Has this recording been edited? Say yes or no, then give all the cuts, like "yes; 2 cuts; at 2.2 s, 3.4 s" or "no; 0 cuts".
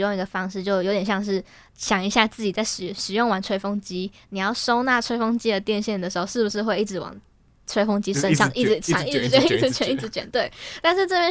no; 0 cuts